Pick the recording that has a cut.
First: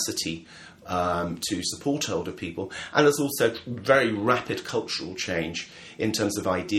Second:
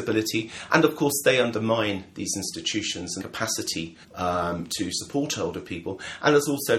second; 2 cuts; at 3.2 s, 4.0 s

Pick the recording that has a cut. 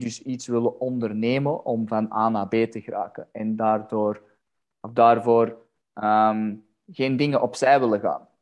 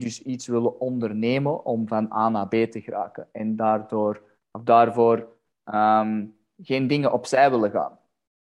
second; 1 cut; at 4.4 s

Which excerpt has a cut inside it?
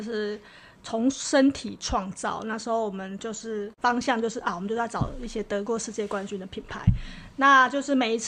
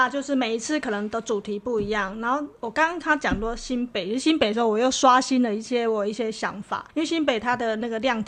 second; 1 cut; at 6.9 s

